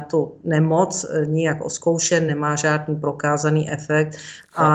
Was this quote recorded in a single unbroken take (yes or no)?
yes